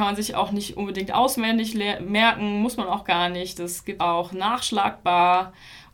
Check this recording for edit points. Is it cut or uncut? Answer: cut